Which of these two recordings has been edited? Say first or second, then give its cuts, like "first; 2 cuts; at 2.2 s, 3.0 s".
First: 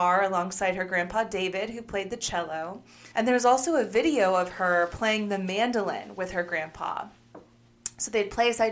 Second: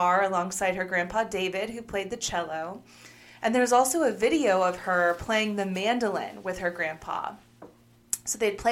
first; 1 cut; at 3.1 s